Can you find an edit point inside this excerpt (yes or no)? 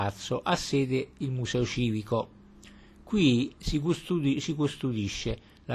no